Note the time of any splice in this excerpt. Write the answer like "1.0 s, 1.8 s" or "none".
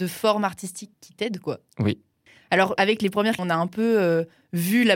0.9 s, 2.8 s, 3.4 s